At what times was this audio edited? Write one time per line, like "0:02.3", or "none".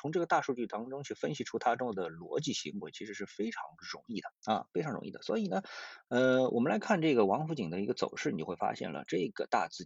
0:04.4